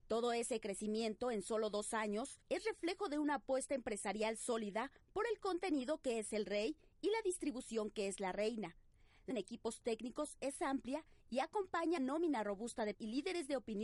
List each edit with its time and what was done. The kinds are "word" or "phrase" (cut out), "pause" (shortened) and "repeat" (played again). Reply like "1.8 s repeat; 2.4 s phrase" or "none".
2.4 s pause; 9.3 s phrase; 12.0 s word; 12.9 s word